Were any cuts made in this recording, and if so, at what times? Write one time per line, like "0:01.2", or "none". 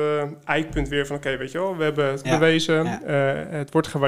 0:02.2